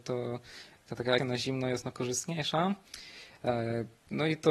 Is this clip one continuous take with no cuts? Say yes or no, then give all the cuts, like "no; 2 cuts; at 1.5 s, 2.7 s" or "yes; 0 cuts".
no; 2 cuts; at 1.2 s, 1.9 s